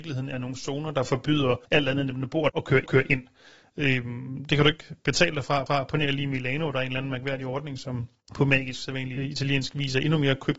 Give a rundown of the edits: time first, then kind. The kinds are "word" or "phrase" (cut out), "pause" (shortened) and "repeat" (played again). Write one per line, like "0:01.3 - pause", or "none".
0:01.7 - pause
0:02.5 - word
0:02.9 - repeat
0:05.7 - repeat
0:09.2 - word